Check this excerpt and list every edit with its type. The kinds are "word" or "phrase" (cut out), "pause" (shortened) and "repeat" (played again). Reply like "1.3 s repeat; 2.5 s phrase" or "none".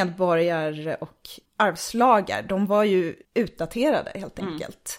1.5 s pause; 3.2 s pause